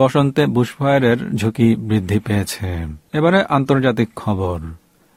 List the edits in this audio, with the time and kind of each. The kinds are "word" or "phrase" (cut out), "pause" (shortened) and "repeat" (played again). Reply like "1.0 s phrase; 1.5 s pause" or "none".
3.1 s pause